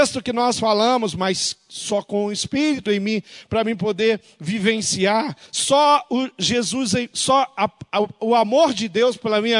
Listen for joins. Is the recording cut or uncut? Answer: cut